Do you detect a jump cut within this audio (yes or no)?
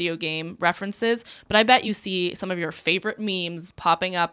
no